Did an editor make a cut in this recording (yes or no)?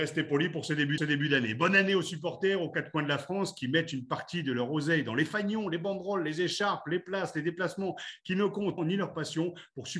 yes